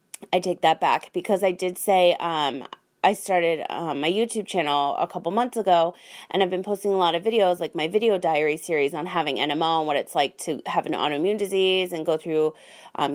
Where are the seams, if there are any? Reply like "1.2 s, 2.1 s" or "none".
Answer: none